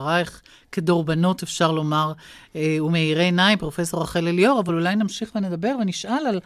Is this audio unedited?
yes; 0 cuts

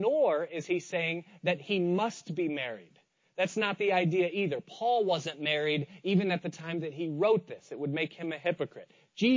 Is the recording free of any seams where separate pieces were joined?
yes; 0 cuts

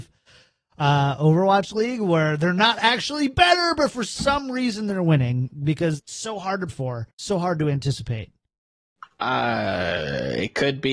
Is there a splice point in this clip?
yes; 3 cuts; at 6.0 s, 6.7 s, 7.1 s

